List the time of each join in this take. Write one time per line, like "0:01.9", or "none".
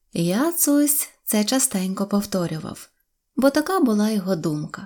none